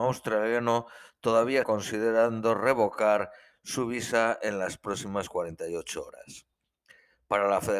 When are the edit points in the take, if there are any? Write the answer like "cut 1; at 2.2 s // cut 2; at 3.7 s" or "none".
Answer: cut 1; at 1.6 s